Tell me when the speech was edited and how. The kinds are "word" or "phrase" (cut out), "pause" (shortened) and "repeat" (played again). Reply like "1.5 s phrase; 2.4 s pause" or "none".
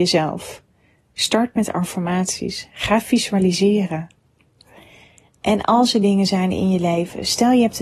none